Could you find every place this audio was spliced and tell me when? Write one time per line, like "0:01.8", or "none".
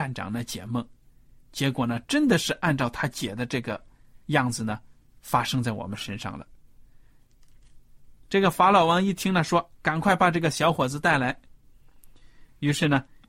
0:04.2